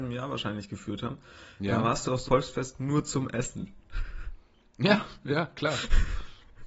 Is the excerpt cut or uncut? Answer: cut